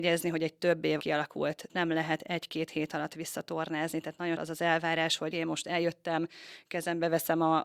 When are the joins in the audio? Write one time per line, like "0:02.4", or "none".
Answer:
0:01.0
0:01.7
0:04.4
0:05.3